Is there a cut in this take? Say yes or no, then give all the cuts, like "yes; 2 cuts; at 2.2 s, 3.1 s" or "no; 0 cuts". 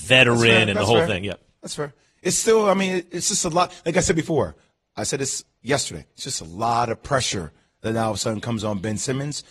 no; 0 cuts